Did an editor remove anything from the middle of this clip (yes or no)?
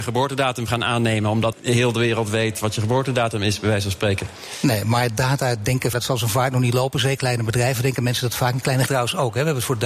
yes